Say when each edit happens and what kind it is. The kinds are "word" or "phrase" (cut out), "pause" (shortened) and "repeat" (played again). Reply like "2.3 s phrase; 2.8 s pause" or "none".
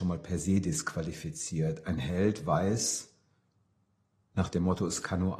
none